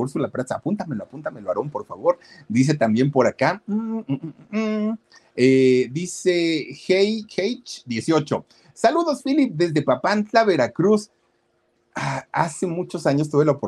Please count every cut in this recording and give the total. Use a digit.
0